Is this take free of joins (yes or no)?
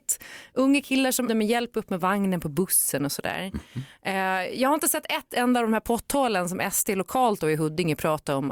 no